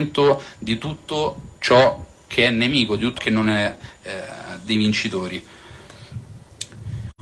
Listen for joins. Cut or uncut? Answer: cut